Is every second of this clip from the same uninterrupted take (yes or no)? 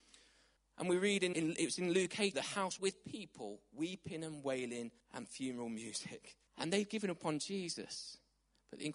no